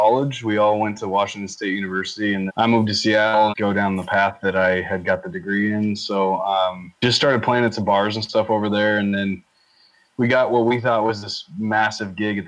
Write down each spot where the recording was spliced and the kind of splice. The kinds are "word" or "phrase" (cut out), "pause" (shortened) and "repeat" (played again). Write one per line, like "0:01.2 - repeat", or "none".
0:02.5 - word
0:03.5 - phrase
0:07.0 - pause

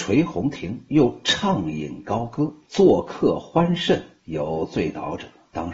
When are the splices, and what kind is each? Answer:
0:02.6 - pause

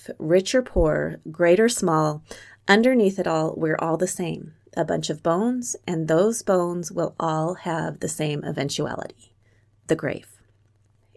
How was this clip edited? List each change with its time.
none

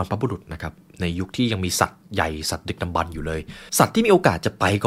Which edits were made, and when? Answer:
0:03.7 - pause

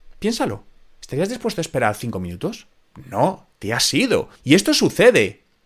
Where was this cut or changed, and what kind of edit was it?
0:04.4 - pause

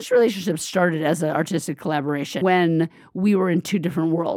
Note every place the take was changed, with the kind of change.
0:02.4 - word

